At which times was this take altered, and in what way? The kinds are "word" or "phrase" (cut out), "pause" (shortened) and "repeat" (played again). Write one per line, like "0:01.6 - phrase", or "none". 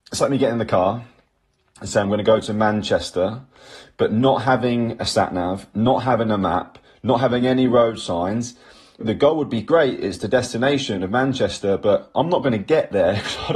0:02.0 - word
0:09.0 - word